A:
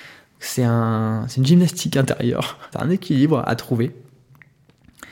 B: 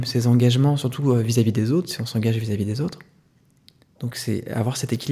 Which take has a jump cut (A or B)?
A